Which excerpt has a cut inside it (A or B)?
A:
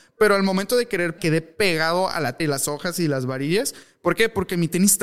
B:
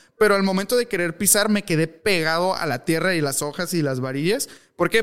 A